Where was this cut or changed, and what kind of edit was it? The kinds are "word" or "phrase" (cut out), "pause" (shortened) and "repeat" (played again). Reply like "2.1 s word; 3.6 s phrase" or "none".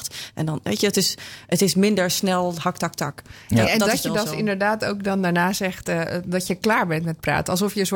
none

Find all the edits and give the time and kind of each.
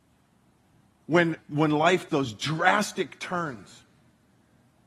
1.4 s word; 2.1 s word

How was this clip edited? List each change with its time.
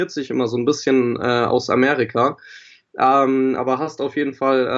none

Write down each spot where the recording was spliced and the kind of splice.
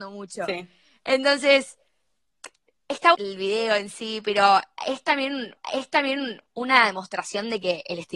3.1 s word; 5.6 s repeat

